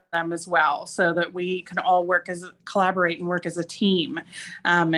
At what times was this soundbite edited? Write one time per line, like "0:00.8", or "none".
none